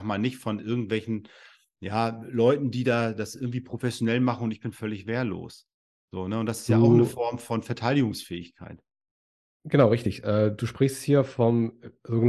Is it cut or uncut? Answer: uncut